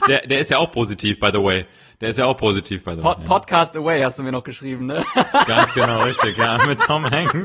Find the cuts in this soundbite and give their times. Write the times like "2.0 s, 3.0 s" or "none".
none